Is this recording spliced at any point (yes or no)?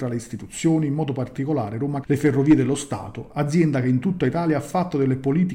yes